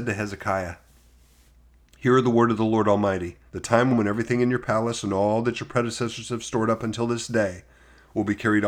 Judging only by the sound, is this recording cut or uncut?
cut